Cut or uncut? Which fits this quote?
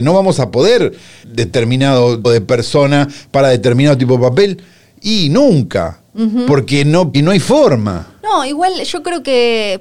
cut